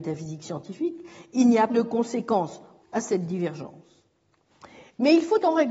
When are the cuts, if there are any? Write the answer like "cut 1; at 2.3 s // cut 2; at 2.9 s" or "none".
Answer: cut 1; at 1.7 s // cut 2; at 2.8 s